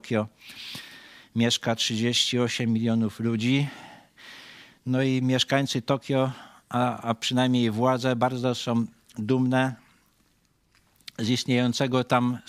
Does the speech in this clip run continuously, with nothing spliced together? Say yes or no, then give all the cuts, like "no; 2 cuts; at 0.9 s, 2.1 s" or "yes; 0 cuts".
yes; 0 cuts